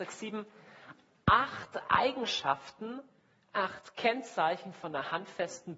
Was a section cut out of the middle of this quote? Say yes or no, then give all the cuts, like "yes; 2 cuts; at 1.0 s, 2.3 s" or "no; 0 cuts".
no; 0 cuts